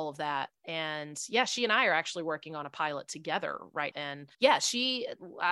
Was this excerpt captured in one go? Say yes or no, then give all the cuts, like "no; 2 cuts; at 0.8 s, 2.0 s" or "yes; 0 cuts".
no; 2 cuts; at 3.9 s, 4.3 s